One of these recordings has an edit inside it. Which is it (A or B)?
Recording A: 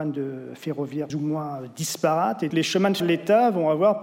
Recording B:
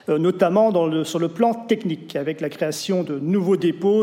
A